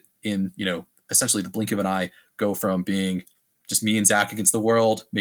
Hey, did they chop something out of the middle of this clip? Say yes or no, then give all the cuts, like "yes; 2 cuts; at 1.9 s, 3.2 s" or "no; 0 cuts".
no; 0 cuts